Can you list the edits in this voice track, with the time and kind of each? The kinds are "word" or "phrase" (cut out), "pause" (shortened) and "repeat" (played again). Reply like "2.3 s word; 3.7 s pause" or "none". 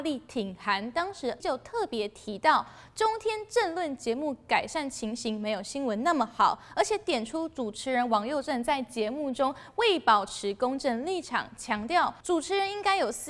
1.4 s word; 12.2 s pause